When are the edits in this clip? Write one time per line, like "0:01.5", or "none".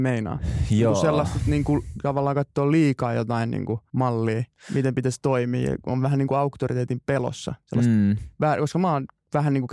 0:03.9